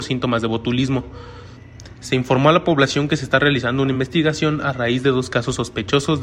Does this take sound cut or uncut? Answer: uncut